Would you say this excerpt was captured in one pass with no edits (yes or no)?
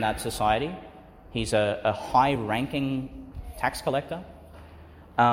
yes